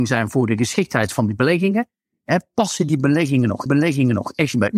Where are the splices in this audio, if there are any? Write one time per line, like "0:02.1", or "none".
0:03.7